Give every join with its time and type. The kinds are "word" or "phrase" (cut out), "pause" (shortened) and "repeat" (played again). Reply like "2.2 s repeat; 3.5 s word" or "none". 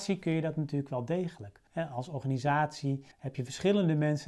1.7 s pause; 3.1 s pause